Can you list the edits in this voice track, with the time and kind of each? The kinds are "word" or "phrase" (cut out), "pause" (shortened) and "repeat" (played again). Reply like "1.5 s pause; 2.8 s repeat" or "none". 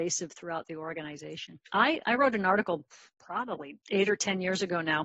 1.7 s pause; 3.8 s pause